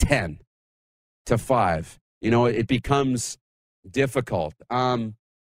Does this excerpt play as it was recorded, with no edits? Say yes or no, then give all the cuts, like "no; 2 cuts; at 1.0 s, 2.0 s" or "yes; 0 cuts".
yes; 0 cuts